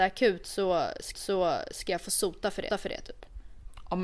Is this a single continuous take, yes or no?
no